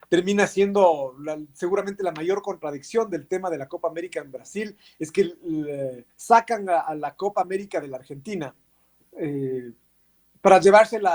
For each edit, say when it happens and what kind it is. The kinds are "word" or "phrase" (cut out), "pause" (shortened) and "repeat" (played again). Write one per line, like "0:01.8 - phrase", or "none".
0:06.1 - pause